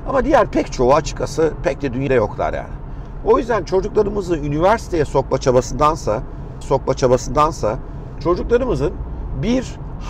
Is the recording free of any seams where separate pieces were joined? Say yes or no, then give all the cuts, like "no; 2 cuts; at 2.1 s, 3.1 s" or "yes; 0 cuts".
no; 2 cuts; at 2.1 s, 6.6 s